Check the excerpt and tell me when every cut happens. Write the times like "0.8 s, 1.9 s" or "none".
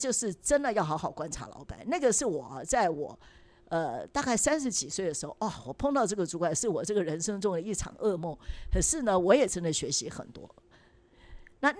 none